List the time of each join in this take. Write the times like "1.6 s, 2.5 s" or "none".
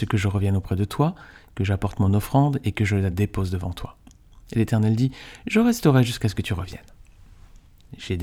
none

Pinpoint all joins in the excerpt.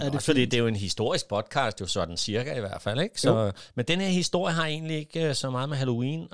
none

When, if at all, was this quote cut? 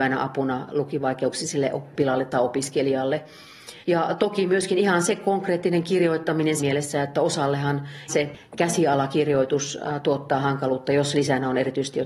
3.8 s, 6.6 s, 8.1 s

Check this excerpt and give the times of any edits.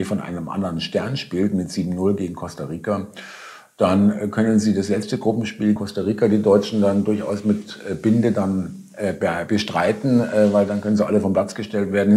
5.8 s

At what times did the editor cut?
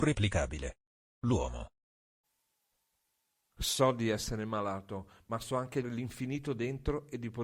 5.8 s

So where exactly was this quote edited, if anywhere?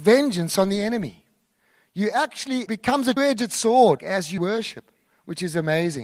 2.7 s, 3.2 s, 4.0 s, 4.4 s

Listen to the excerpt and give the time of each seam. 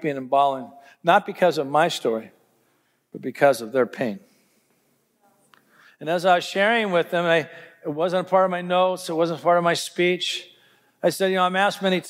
none

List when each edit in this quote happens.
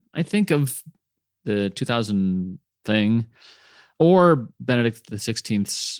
2.7 s

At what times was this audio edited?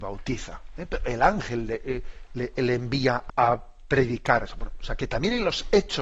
3.3 s

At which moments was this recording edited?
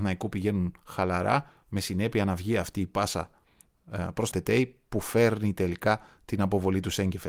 4.3 s

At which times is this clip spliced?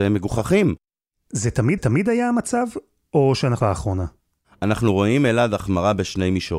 1.8 s, 3.6 s

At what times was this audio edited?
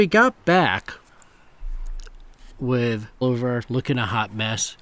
3.2 s, 3.6 s

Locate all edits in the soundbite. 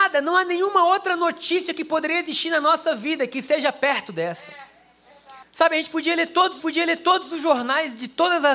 5.4 s, 6.6 s

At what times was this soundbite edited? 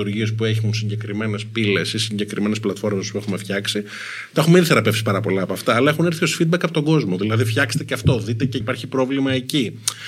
8.6 s

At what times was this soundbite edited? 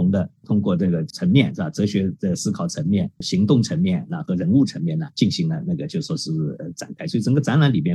5.1 s

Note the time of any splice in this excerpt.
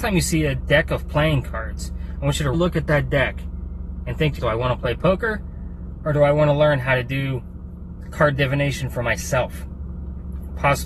2.5 s, 4.4 s

